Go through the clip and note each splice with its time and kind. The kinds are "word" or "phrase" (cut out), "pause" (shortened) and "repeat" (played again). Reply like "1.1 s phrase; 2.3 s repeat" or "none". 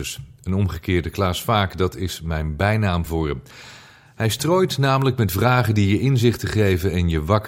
none